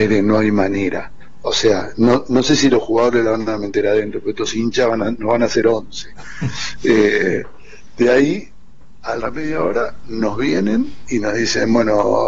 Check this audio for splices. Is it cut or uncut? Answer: cut